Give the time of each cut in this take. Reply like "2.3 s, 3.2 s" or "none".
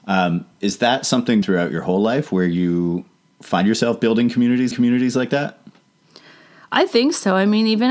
1.4 s, 4.7 s